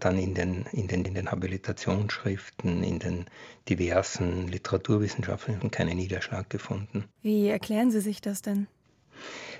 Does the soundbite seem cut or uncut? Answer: cut